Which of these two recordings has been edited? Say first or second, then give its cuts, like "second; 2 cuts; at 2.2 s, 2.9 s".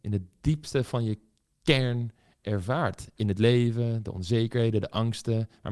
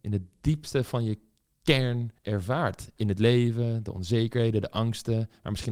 second; 1 cut; at 2.2 s